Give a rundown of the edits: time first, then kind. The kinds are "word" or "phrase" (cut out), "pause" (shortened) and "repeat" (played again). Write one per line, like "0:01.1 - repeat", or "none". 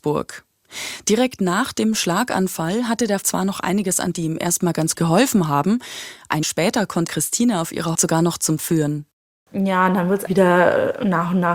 0:03.2 - word
0:04.1 - word
0:04.9 - word
0:06.4 - word
0:07.1 - word
0:07.9 - word
0:08.6 - word
0:10.3 - word